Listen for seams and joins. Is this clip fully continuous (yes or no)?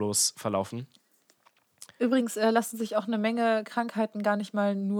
yes